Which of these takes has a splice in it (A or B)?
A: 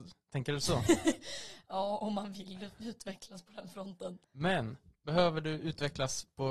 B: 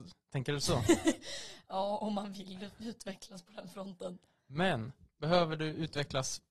A